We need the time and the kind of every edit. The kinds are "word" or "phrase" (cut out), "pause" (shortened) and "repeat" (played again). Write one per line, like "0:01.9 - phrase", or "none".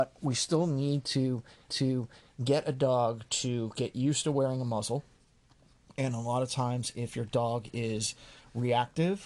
0:01.7 - repeat